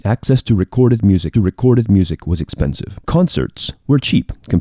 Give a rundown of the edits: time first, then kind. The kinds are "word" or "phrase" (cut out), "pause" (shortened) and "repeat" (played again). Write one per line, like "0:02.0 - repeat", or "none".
0:01.3 - repeat
0:03.0 - pause

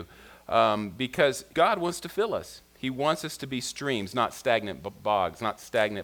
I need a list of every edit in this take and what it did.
0:01.5 - word

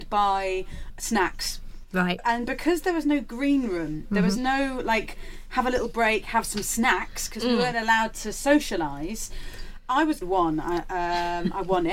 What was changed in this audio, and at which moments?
0:10.2 - phrase

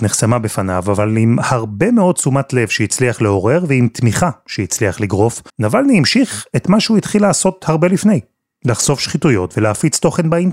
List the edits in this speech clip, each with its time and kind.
0:05.5 - pause

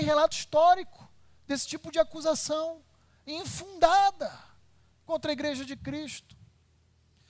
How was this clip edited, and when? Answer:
none

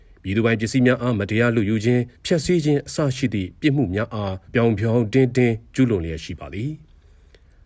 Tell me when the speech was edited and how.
0:02.2 - pause
0:04.5 - pause

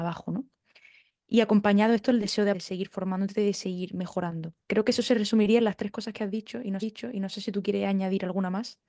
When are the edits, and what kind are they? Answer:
0:02.5 - word
0:04.6 - pause
0:06.8 - repeat

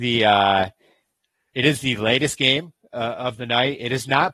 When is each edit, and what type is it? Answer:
none

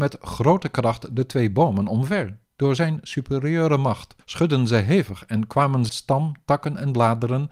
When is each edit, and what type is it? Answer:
0:02.4 - pause
0:04.2 - pause
0:05.9 - word

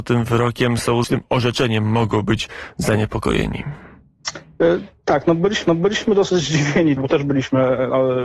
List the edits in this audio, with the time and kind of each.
0:01.0 - word
0:05.7 - repeat
0:07.0 - phrase

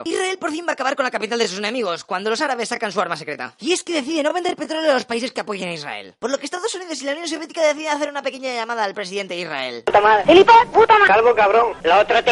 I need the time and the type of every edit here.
none

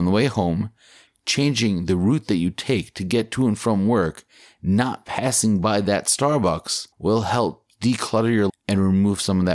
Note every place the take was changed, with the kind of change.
0:06.9 - pause
0:08.5 - word

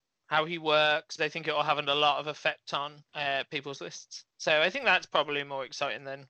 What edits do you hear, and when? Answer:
0:01.2 - word
0:03.1 - pause

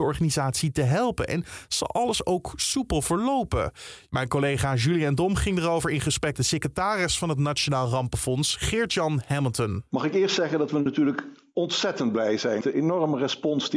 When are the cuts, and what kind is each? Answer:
0:06.3 - word
0:12.6 - word

